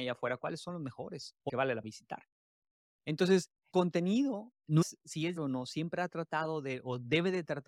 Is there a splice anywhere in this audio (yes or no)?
yes